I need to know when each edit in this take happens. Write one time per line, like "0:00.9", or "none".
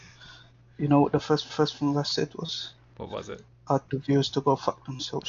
0:01.5
0:03.9